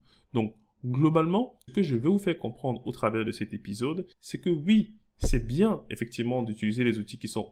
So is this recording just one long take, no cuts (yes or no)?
no